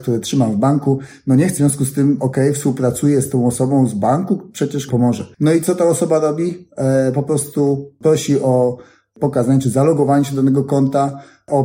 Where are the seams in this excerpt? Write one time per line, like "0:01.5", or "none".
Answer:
0:01.6
0:04.9